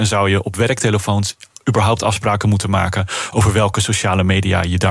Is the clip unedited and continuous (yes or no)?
yes